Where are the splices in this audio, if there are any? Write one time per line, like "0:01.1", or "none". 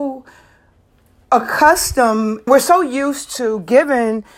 0:02.5